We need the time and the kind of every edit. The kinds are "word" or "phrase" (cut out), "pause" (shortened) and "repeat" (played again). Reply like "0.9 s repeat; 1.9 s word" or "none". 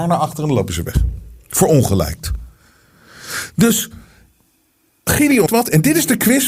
5.5 s word